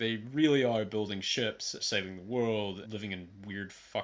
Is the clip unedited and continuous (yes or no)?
no